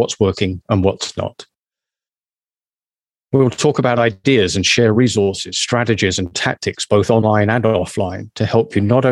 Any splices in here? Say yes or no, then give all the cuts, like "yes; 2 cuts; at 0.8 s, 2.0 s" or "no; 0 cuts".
no; 0 cuts